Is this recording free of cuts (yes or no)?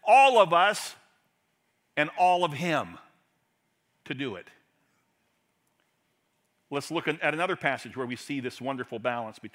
yes